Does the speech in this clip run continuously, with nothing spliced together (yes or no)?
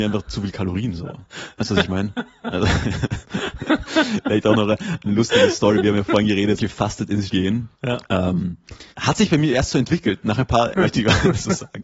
no